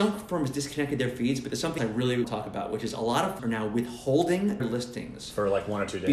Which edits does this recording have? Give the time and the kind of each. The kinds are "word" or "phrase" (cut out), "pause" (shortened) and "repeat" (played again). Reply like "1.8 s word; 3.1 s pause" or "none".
1.8 s word; 2.2 s word; 3.4 s word; 4.6 s word